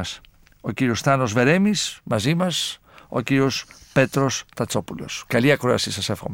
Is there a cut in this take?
no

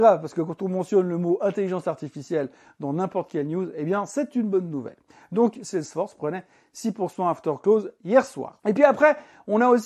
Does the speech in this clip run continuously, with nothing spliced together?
yes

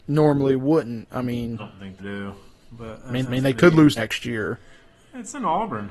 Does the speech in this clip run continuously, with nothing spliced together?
no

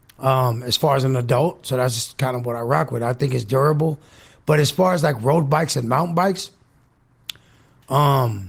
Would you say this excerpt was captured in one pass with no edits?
yes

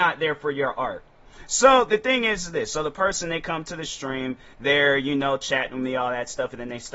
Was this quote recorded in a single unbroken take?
yes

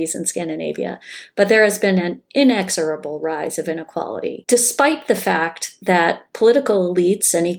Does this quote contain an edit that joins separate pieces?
no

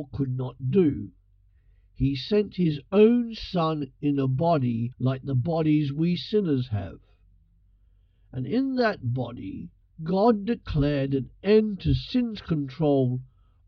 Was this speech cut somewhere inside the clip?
yes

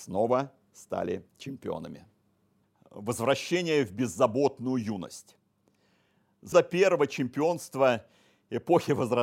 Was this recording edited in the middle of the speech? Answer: yes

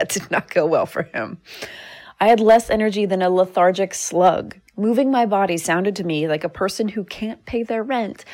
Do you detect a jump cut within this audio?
yes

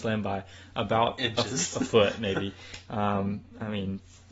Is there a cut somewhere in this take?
no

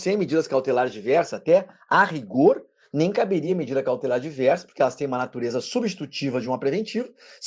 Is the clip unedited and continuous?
yes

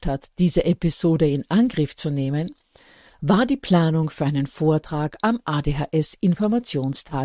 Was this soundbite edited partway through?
no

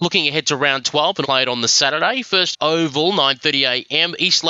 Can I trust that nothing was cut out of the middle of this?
no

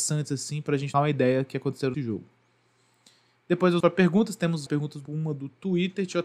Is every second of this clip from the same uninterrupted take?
no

